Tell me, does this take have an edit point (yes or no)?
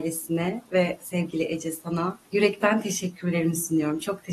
yes